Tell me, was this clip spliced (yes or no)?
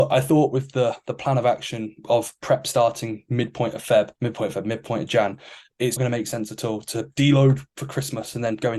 yes